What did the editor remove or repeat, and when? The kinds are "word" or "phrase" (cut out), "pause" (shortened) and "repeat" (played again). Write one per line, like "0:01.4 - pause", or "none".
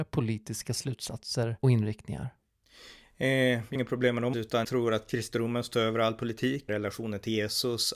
0:01.6 - word
0:03.8 - word
0:04.3 - word
0:04.6 - word
0:06.7 - word